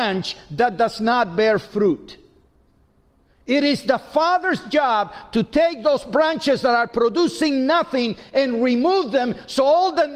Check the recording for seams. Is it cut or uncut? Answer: uncut